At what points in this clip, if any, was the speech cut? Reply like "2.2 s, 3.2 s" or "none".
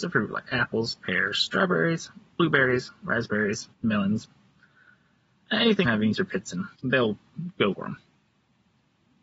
3.7 s, 5.8 s, 6.1 s, 6.7 s, 7.7 s